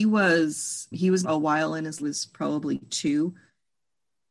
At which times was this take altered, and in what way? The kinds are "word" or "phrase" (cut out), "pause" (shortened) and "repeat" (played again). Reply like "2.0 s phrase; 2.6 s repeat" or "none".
0.9 s word; 1.2 s phrase; 2.0 s phrase